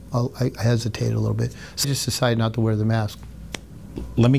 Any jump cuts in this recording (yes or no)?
yes